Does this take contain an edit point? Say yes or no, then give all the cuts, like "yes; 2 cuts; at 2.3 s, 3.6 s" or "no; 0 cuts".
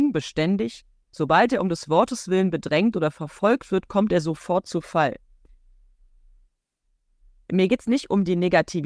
no; 0 cuts